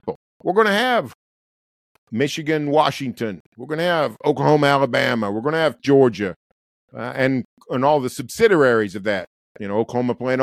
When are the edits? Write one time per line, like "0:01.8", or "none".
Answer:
0:05.8